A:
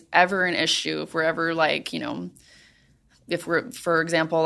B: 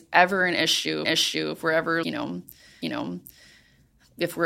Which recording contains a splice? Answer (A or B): B